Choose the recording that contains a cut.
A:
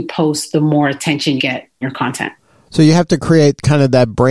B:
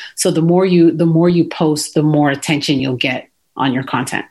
A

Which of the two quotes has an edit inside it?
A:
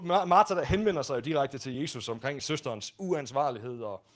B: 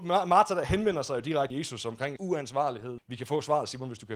B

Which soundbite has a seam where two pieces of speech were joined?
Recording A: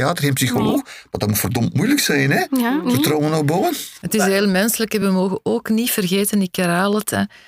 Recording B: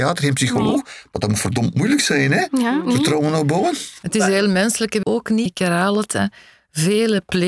B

